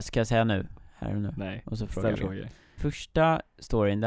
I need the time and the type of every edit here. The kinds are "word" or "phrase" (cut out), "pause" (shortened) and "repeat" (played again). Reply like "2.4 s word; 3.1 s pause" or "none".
2.1 s word; 2.8 s word

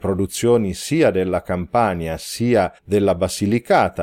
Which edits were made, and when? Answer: 2.8 s pause

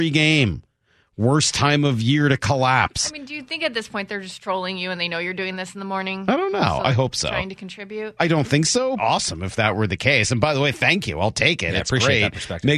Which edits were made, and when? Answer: 9.0 s phrase

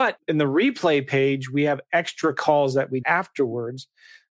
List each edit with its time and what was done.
3.0 s word

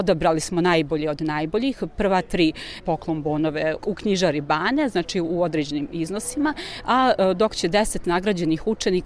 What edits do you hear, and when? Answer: 2.8 s phrase; 3.8 s word

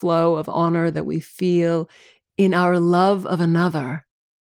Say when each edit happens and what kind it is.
none

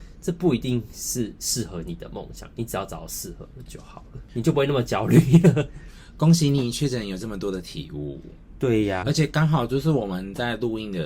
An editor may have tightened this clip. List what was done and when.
9.0 s word

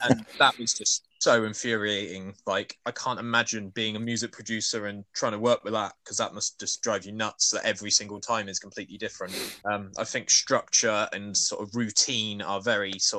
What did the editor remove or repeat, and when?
1.1 s pause; 9.6 s pause

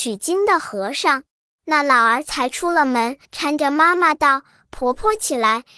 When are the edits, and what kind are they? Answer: 1.3 s pause; 3.2 s pause

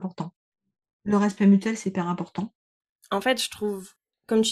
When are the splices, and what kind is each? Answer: none

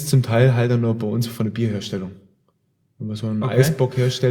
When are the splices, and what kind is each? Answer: none

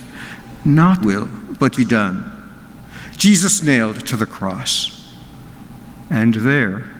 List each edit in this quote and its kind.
1.0 s word; 1.7 s word; 3.6 s word

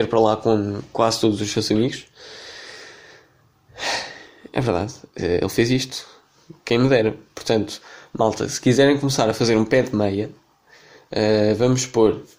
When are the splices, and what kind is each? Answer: none

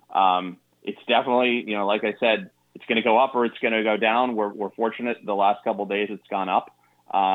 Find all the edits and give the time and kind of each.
none

